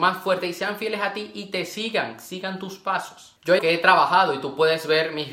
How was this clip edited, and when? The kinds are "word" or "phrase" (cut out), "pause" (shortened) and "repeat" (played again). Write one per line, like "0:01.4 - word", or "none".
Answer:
0:03.6 - word

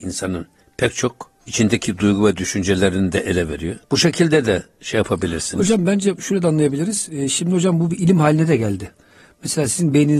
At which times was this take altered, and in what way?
0:01.4 - pause
0:03.8 - pause

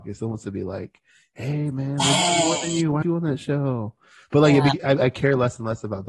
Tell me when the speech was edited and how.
0:03.0 - word

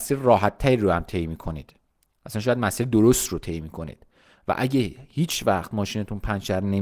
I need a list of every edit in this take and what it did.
none

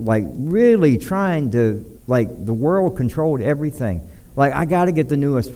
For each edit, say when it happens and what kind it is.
0:02.0 - pause
0:04.2 - pause

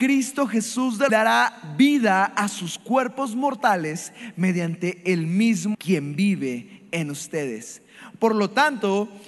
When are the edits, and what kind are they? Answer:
0:01.1 - phrase
0:05.7 - word

